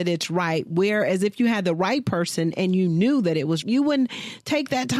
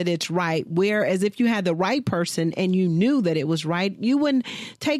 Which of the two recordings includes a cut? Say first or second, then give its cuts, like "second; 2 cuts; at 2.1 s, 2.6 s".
first; 1 cut; at 3.6 s